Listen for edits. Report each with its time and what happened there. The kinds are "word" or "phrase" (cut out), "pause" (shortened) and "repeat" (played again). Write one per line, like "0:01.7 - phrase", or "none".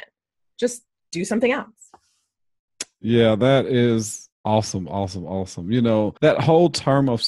0:04.3 - pause
0:06.2 - pause